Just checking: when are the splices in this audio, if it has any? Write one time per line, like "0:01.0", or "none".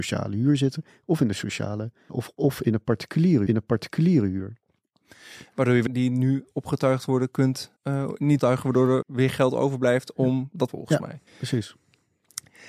0:02.1
0:03.5
0:05.9
0:07.8
0:08.4
0:09.0
0:10.7
0:11.3